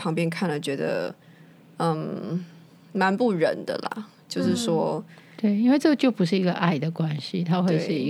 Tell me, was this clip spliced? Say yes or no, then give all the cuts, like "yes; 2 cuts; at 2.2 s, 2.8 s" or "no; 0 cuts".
no; 0 cuts